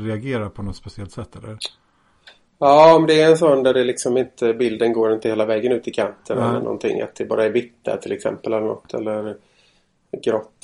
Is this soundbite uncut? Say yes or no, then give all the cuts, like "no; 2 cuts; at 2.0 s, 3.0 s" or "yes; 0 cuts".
yes; 0 cuts